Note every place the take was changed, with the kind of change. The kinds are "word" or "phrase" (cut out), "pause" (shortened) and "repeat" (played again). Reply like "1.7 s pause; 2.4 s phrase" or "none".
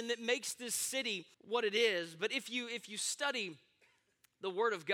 1.3 s pause